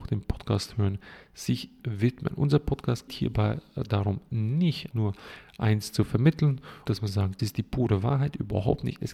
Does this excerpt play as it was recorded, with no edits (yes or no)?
no